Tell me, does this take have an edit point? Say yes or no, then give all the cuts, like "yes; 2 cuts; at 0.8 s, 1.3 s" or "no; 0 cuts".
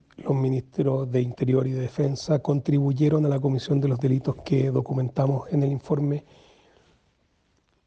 no; 0 cuts